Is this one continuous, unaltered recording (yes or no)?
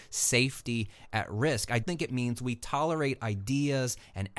no